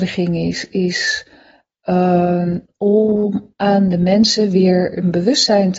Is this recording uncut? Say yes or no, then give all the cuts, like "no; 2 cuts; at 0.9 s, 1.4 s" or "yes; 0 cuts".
yes; 0 cuts